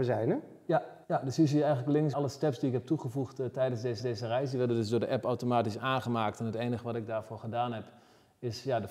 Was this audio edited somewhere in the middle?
yes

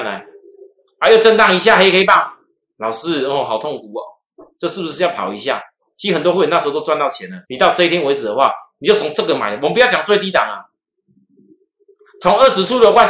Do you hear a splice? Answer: yes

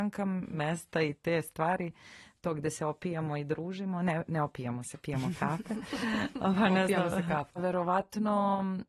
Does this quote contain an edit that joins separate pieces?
no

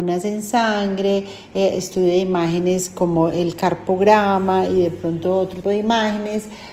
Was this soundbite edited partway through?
yes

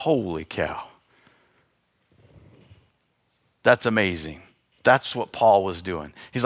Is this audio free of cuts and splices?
yes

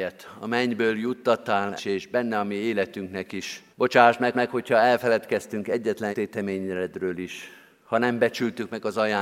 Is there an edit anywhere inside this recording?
yes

